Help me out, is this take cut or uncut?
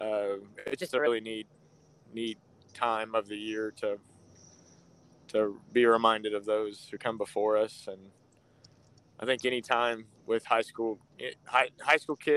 uncut